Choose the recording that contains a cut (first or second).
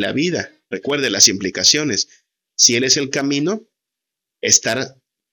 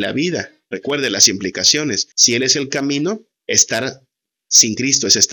second